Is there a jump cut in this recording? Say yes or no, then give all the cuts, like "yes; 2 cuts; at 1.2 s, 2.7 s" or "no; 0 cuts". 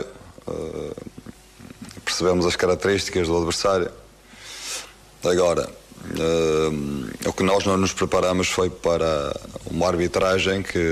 no; 0 cuts